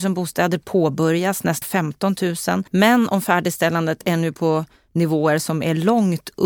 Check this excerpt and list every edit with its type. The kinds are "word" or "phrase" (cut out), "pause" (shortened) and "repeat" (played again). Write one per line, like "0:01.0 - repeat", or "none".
0:01.6 - word
0:02.7 - pause